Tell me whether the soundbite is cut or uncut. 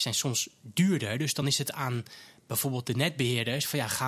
uncut